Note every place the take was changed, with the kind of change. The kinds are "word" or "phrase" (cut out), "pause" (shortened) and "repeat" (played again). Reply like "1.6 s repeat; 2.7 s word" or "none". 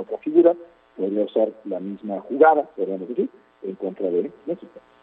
2.7 s pause